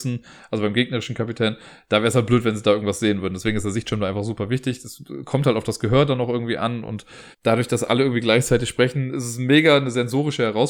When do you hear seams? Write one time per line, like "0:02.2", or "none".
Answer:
0:07.3